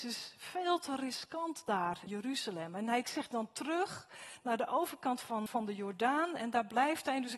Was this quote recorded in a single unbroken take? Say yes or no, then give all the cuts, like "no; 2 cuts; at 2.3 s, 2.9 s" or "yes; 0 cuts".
no; 3 cuts; at 2.1 s, 3.0 s, 5.5 s